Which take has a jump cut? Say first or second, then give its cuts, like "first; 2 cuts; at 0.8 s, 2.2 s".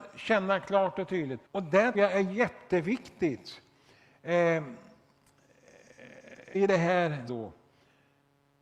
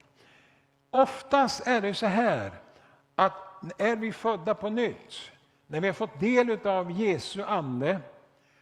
first; 4 cuts; at 1.5 s, 1.9 s, 6.5 s, 7.3 s